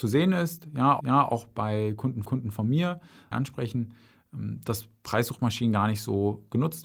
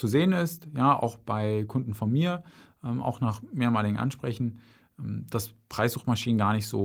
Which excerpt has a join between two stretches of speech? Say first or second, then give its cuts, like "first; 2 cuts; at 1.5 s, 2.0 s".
first; 3 cuts; at 1.0 s, 2.2 s, 3.3 s